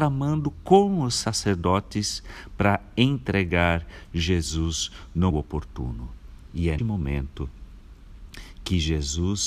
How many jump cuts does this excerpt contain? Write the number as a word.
two